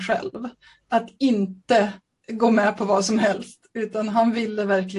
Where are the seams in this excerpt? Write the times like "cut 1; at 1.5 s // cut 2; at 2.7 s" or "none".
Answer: none